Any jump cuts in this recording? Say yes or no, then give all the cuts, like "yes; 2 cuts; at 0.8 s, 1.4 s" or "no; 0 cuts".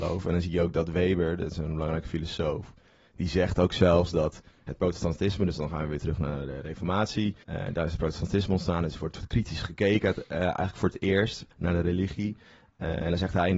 yes; 2 cuts; at 7.4 s, 11.5 s